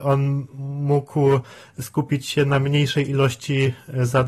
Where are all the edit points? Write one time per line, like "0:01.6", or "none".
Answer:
none